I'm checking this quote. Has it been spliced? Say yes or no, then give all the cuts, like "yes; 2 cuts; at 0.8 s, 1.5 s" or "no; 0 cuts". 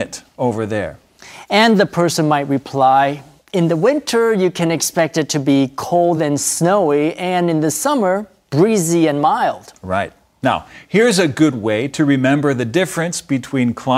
no; 0 cuts